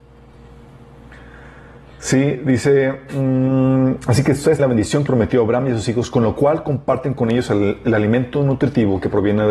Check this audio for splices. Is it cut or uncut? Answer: cut